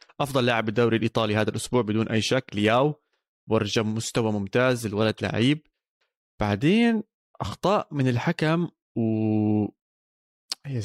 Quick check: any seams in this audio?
no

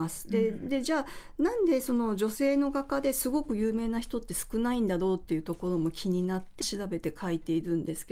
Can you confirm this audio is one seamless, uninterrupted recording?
no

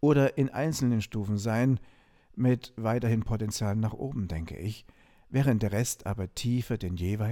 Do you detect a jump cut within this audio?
no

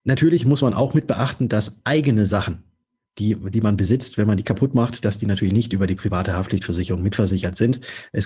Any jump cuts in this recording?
no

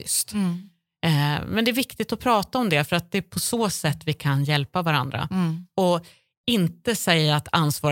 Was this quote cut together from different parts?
no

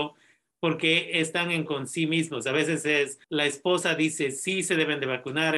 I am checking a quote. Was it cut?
yes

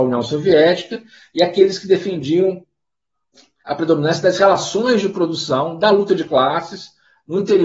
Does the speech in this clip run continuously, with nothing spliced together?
yes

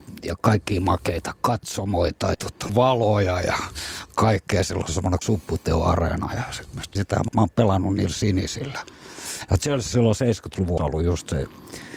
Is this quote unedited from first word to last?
no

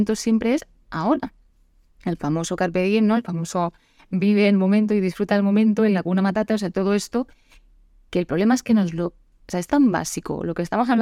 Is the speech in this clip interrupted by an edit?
no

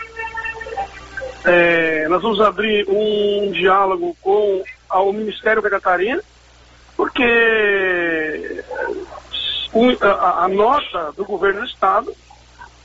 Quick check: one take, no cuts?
no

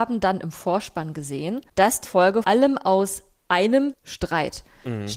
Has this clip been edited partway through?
yes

